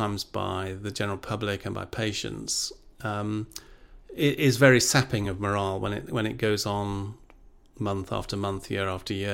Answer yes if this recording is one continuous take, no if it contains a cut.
yes